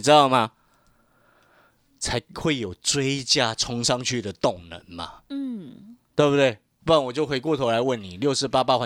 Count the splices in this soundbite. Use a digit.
2